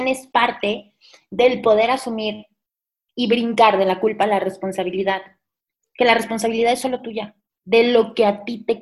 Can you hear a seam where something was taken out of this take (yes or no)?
no